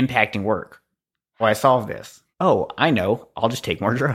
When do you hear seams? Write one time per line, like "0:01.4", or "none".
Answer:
0:01.4
0:02.3

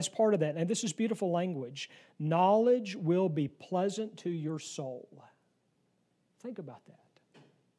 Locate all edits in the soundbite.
none

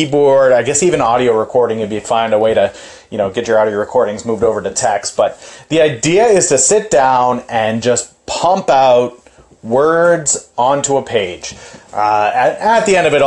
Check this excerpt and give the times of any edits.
none

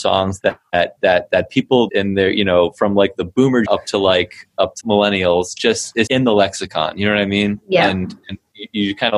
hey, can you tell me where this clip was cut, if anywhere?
0:01.9
0:03.7
0:04.8
0:06.1

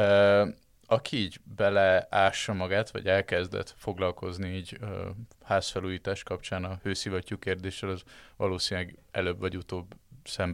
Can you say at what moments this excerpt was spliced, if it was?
none

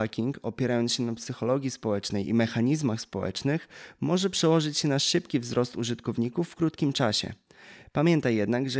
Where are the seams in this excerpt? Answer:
none

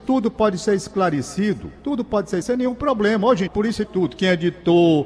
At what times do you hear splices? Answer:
0:01.8
0:02.4
0:03.5
0:03.8

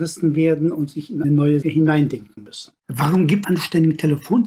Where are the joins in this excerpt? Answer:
0:01.2
0:01.6
0:02.8
0:03.4

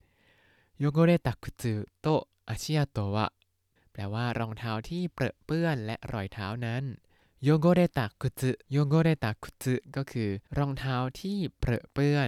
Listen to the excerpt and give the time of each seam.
0:03.8
0:07.2
0:08.6
0:10.5

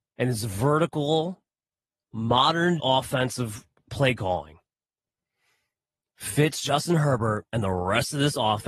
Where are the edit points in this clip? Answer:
0:02.8

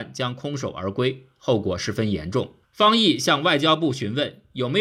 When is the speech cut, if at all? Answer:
0:02.6

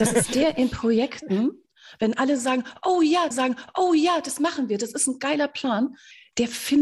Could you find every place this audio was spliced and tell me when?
0:03.3

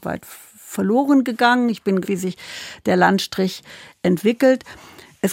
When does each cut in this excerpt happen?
0:02.0

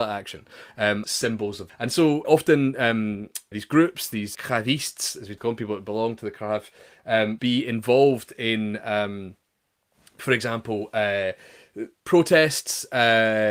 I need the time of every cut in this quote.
0:01.0
0:01.7
0:02.2
0:03.5
0:04.3
0:05.4
0:07.4
0:12.0

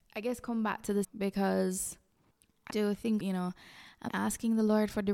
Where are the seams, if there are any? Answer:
0:01.0
0:02.7
0:03.2
0:04.1

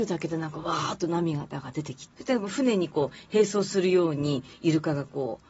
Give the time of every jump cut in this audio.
0:02.1

